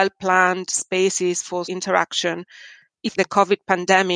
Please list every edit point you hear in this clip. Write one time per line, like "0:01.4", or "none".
0:01.7
0:03.1